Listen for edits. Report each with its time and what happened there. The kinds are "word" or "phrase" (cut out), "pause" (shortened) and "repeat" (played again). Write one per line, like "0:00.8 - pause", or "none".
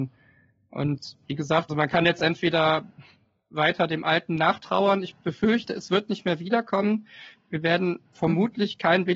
0:01.2 - word
0:01.7 - word